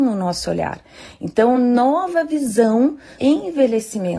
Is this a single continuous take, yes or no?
no